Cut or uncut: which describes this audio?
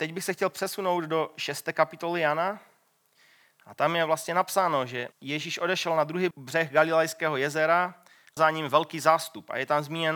cut